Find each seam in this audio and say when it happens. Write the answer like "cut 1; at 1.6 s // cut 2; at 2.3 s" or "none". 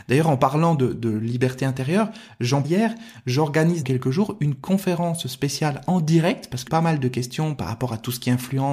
cut 1; at 2.6 s // cut 2; at 3.8 s // cut 3; at 6.7 s